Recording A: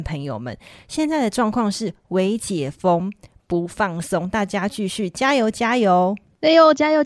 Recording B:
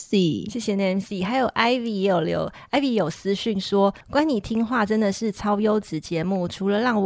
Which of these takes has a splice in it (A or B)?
B